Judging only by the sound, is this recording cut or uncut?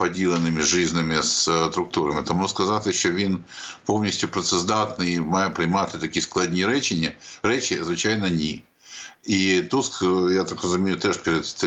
uncut